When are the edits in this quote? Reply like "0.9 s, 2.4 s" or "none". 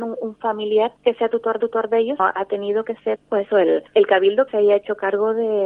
1.0 s, 1.6 s, 2.2 s, 3.2 s, 3.9 s, 4.5 s